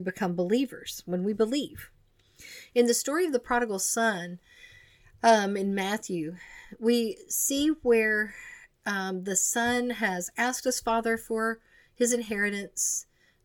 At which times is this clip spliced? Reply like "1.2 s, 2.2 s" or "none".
none